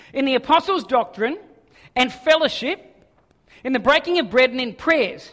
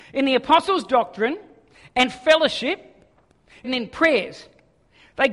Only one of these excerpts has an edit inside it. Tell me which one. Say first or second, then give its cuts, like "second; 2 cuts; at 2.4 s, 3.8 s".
second; 1 cut; at 3.6 s